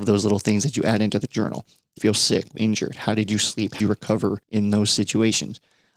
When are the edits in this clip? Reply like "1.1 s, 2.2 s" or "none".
2.0 s, 2.5 s, 3.8 s, 4.4 s